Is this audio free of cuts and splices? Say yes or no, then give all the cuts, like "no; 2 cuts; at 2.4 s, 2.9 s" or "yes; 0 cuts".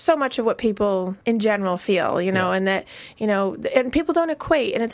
no; 1 cut; at 1.2 s